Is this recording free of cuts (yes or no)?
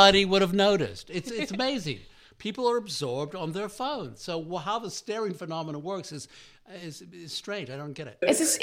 yes